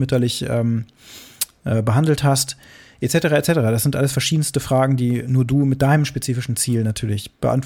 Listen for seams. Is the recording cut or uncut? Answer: uncut